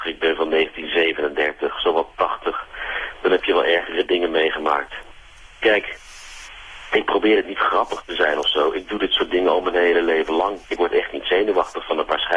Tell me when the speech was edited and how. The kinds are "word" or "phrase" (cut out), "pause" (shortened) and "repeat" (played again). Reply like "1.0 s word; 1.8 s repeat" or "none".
5.5 s pause; 10.6 s pause

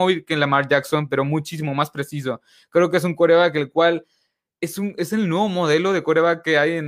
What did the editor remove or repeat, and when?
none

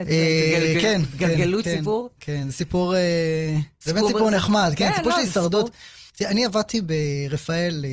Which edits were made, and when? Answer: 1.6 s word; 3.7 s pause; 6.1 s pause

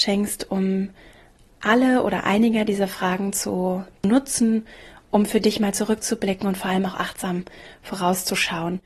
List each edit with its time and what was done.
none

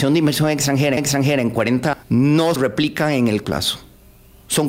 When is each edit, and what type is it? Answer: 1.0 s repeat; 1.9 s word; 2.6 s word; 3.4 s word

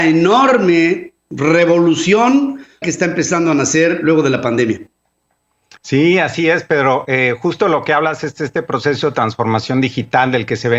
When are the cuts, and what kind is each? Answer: 2.8 s phrase

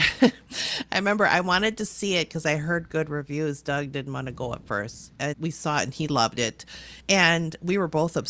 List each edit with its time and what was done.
5.3 s word; 7.0 s pause

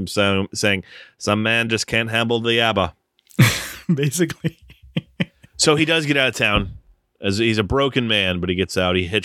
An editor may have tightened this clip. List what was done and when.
none

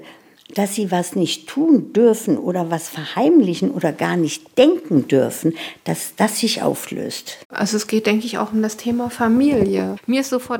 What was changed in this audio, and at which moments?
7.4 s pause

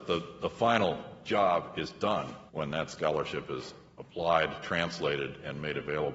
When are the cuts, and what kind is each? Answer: 2.5 s pause

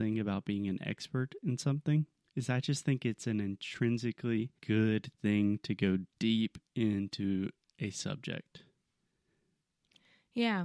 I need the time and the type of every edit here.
2.2 s pause; 4.6 s pause; 6.1 s pause

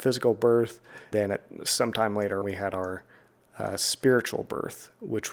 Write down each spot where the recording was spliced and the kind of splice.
1.1 s word; 1.6 s word; 2.4 s word

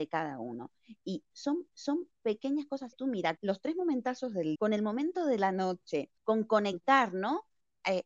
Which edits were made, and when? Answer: 1.7 s repeat; 2.9 s phrase; 3.4 s word; 4.6 s word; 6.2 s pause

